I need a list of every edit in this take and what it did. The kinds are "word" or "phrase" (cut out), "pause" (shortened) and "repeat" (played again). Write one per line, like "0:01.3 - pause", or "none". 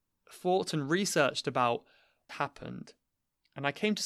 0:02.3 - phrase